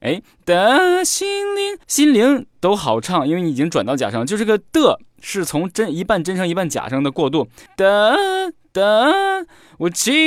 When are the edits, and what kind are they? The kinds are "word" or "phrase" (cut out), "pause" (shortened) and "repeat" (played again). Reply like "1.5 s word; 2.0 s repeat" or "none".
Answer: 1.8 s pause; 7.7 s pause